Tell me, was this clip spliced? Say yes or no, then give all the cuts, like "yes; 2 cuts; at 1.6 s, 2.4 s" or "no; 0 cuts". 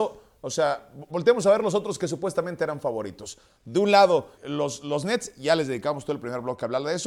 yes; 1 cut; at 4.4 s